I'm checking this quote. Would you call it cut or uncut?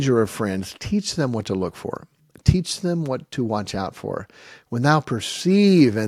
uncut